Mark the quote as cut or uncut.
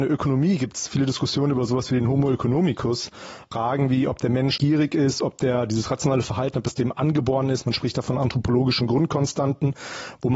cut